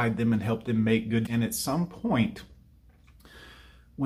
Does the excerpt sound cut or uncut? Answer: cut